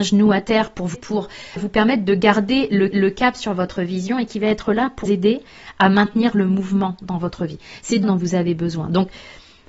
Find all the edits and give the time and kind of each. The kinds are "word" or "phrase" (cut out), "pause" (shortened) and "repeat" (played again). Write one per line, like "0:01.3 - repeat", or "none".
0:00.9 - word
0:01.6 - word
0:02.9 - repeat
0:05.1 - word
0:08.0 - word